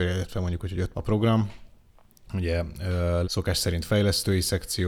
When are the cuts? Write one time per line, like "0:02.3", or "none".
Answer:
0:00.9
0:03.2